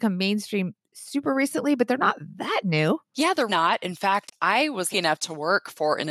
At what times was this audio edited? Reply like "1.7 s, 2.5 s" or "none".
3.5 s, 4.9 s